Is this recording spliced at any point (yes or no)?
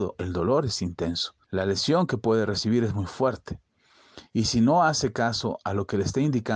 yes